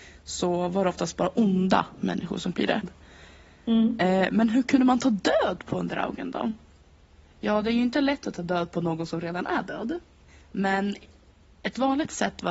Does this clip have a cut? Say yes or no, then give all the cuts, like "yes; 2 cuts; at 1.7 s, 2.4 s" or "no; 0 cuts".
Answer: yes; 1 cut; at 2.5 s